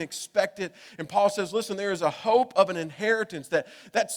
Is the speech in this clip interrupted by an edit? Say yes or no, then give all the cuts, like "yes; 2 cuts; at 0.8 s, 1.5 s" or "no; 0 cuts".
no; 0 cuts